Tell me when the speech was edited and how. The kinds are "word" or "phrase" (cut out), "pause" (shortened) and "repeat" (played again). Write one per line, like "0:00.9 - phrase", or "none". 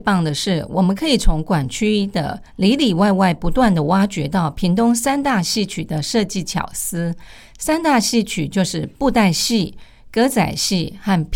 none